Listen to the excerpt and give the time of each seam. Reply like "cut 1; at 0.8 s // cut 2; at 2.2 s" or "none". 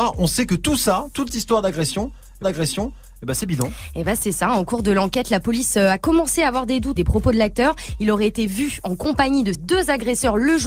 cut 1; at 1.3 s // cut 2; at 2.4 s // cut 3; at 7.0 s // cut 4; at 9.5 s